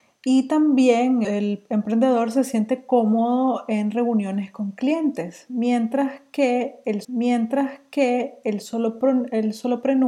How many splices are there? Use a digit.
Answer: 2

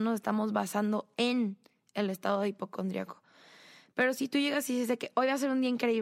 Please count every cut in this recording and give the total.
0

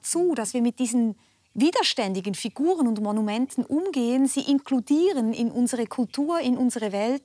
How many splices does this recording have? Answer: 0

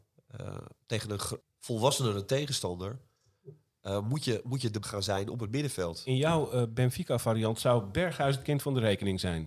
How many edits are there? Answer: 2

